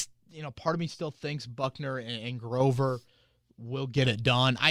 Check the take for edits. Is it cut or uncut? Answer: uncut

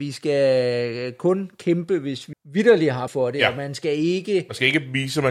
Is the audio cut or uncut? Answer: cut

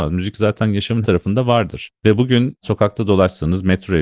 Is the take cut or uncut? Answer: cut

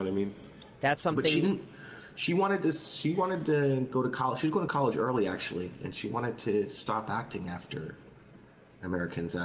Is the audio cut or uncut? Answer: uncut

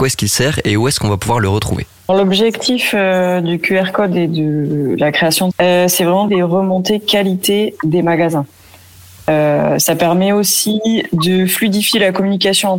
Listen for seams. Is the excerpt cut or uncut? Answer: cut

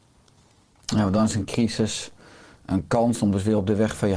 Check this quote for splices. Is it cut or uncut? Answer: uncut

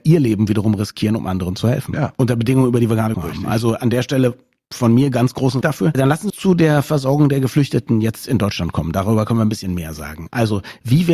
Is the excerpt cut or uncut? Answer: cut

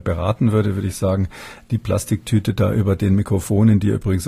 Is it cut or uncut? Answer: uncut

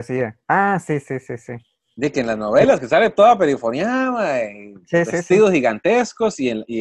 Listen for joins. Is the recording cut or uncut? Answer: uncut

